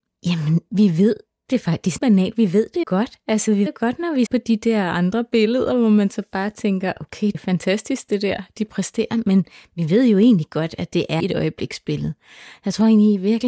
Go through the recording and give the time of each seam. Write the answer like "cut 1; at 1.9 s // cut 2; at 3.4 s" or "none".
cut 1; at 2.0 s // cut 2; at 2.8 s // cut 3; at 3.7 s // cut 4; at 4.3 s // cut 5; at 7.3 s // cut 6; at 11.2 s